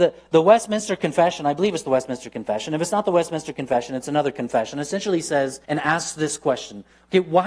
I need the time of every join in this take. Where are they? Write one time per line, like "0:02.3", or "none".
0:05.6